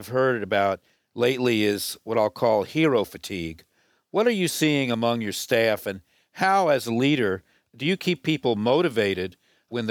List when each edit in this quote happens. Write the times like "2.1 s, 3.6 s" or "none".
none